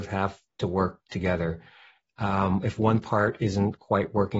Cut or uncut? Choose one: uncut